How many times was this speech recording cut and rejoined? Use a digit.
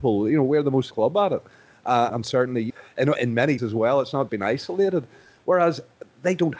6